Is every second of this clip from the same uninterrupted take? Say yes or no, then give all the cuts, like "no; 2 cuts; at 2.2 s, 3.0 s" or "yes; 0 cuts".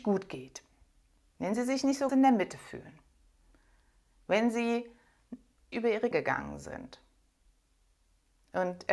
no; 3 cuts; at 2.1 s, 5.7 s, 6.1 s